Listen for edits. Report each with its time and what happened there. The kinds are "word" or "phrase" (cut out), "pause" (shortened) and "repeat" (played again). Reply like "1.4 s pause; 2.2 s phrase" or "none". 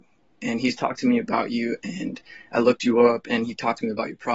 none